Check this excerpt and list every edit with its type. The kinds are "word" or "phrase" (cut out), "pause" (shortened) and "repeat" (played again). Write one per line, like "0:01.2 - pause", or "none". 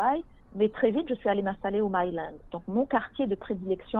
none